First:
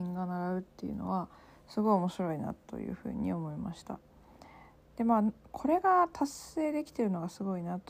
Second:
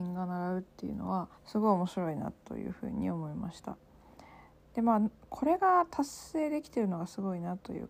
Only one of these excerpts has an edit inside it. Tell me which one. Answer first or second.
second